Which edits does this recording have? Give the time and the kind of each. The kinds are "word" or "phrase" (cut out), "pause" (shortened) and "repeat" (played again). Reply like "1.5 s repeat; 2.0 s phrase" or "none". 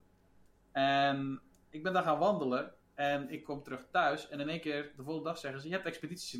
none